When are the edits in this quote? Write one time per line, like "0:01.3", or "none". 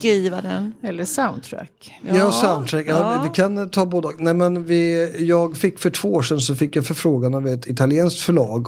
none